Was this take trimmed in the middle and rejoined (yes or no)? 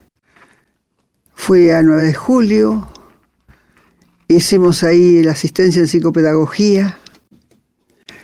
no